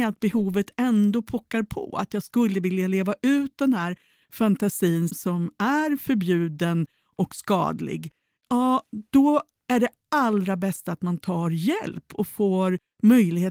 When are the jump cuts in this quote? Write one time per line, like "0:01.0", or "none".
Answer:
0:05.1

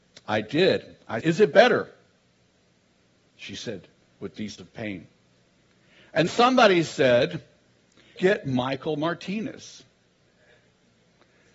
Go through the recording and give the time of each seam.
0:01.2
0:04.0
0:04.6
0:06.3
0:08.2

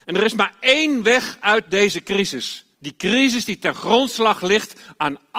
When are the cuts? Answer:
0:02.7

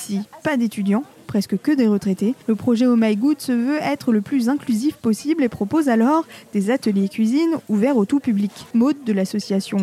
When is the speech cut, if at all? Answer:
0:02.4
0:08.7

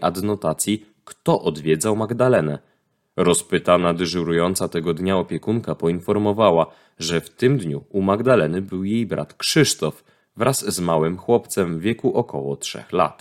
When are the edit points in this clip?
none

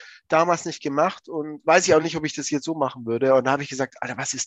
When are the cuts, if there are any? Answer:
none

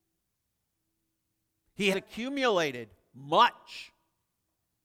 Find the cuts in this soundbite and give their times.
0:01.9

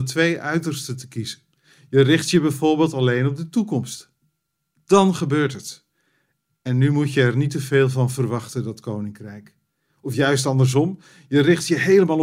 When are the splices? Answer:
none

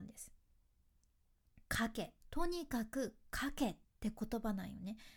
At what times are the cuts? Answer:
0:01.6
0:02.2
0:03.8

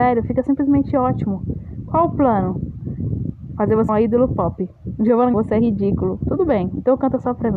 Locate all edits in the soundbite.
0:03.9
0:05.3

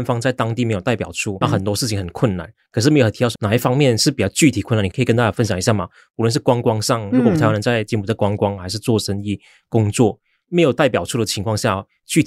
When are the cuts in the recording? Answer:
0:01.4
0:03.4

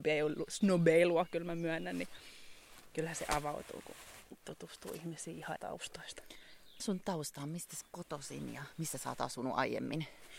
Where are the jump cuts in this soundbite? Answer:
0:05.6
0:06.8
0:07.8

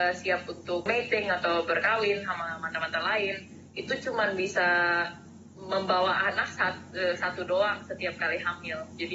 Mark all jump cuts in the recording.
none

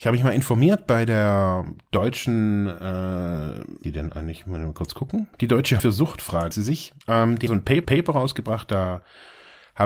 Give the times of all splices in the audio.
0:03.8
0:05.3
0:05.8
0:06.5
0:07.0
0:07.5
0:07.8

